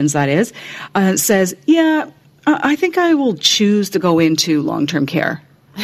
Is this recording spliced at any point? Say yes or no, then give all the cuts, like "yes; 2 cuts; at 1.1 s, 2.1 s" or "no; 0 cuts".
no; 0 cuts